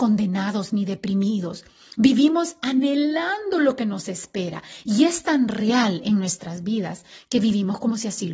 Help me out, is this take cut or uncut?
uncut